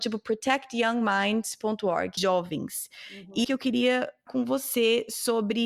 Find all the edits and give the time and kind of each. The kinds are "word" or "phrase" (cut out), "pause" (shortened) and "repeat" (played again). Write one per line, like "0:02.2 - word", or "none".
0:02.2 - phrase
0:03.4 - word
0:04.3 - word